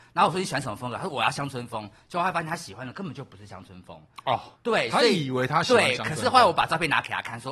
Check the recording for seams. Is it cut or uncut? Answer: cut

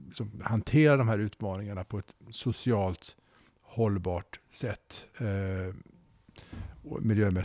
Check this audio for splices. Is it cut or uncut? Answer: uncut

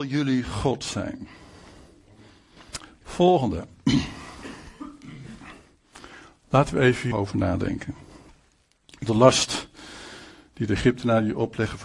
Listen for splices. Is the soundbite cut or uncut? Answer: cut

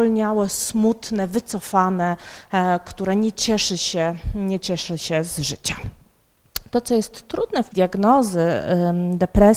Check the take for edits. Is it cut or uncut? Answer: cut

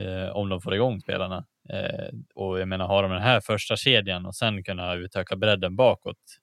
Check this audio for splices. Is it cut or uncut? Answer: cut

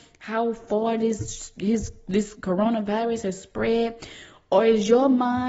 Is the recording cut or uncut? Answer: uncut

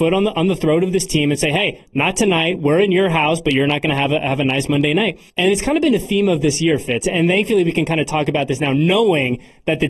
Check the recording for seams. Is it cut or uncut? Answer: cut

